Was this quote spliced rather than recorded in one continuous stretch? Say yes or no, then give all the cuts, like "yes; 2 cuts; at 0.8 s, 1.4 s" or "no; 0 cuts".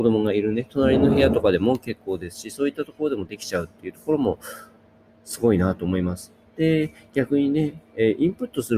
no; 0 cuts